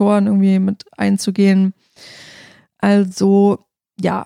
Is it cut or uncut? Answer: uncut